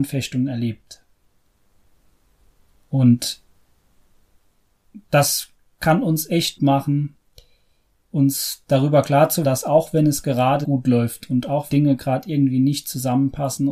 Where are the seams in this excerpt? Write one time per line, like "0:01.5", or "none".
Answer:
0:06.6
0:09.4
0:10.6
0:11.7